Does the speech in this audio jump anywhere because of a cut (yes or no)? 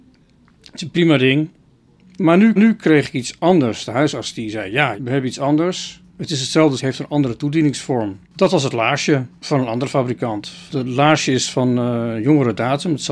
yes